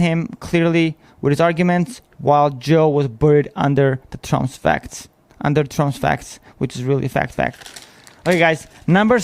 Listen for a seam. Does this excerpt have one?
no; 0 cuts

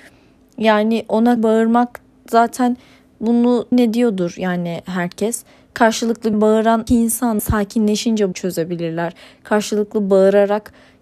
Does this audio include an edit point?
yes; 6 cuts; at 1.4 s, 3.7 s, 6.3 s, 6.9 s, 7.4 s, 8.3 s

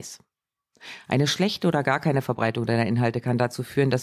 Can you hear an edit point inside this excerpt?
no; 0 cuts

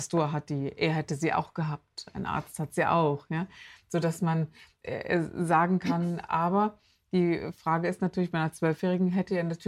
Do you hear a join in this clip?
no; 0 cuts

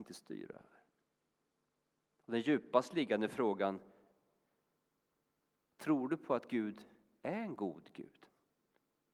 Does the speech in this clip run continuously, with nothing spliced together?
yes; 0 cuts

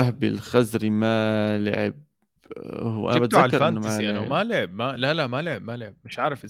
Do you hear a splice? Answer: no; 0 cuts

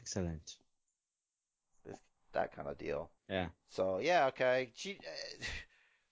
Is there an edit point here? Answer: yes; 1 cut; at 3.2 s

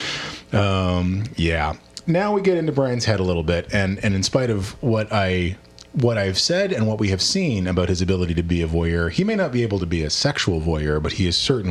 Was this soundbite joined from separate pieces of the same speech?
yes; 1 cut; at 2.0 s

